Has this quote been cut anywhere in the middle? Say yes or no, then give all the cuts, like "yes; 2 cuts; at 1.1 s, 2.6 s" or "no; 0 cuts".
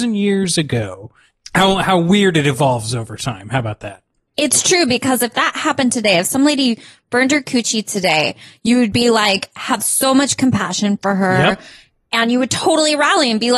no; 0 cuts